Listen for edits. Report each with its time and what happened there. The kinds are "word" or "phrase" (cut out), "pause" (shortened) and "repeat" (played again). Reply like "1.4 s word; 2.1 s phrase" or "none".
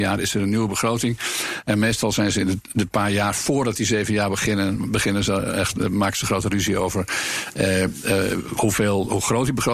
none